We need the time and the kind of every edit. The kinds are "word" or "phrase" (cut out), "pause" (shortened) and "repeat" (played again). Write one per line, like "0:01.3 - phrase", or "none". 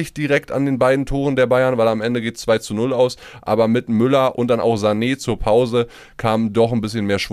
none